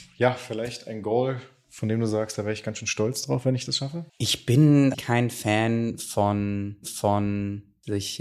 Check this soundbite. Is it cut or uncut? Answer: cut